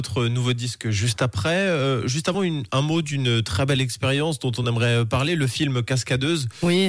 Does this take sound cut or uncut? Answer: uncut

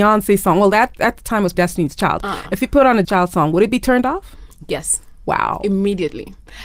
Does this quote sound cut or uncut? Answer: cut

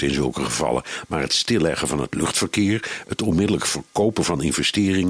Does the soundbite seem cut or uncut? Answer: uncut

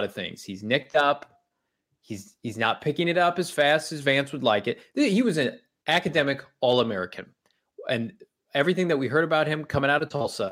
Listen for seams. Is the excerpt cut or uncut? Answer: uncut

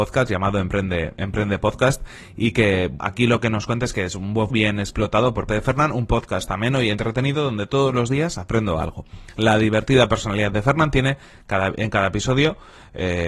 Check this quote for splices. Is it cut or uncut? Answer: cut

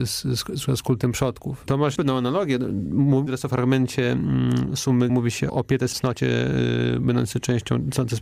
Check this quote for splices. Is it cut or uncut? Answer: cut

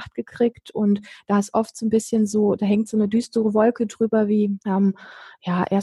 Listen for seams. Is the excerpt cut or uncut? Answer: cut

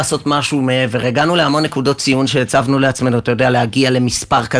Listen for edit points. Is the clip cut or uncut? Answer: uncut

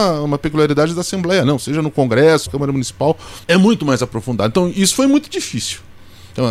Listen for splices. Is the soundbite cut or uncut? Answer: cut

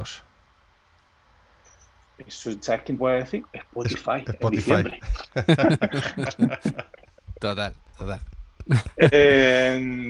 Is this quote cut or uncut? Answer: cut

